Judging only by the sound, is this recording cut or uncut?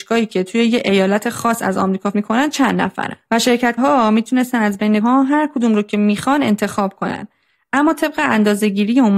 cut